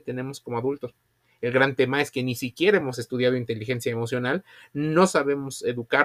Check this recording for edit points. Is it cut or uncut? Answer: uncut